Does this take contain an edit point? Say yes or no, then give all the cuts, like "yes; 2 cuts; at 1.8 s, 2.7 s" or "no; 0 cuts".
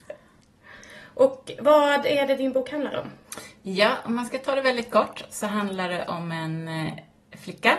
no; 0 cuts